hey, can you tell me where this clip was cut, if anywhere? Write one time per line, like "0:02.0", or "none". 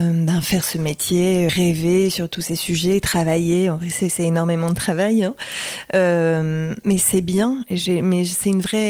0:01.5

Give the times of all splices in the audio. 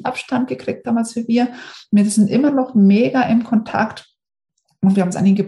none

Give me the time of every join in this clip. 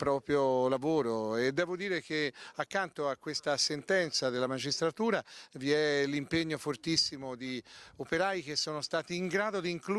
none

